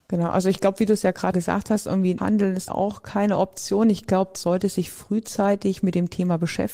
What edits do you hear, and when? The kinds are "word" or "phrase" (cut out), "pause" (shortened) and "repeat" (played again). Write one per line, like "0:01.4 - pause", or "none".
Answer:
0:01.3 - word
0:02.2 - word
0:02.7 - word
0:04.3 - word